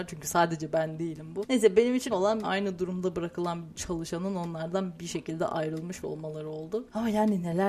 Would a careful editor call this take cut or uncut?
cut